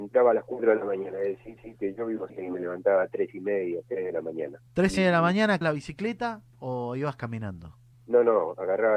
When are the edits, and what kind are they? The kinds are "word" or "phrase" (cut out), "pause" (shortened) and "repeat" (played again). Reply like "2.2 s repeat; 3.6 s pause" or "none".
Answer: 1.6 s repeat; 2.3 s phrase; 4.7 s pause; 5.0 s word; 5.6 s word; 6.5 s pause; 7.9 s pause